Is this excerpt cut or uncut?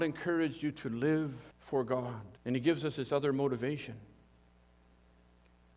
cut